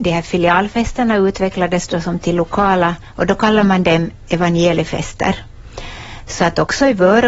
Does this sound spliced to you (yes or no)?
no